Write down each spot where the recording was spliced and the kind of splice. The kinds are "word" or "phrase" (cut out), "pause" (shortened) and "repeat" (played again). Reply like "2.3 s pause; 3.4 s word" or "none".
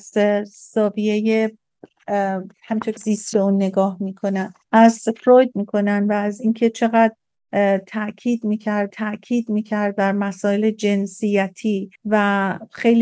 2.5 s pause; 3.0 s word; 3.3 s word; 4.6 s pause; 5.5 s word; 8.9 s repeat; 11.9 s pause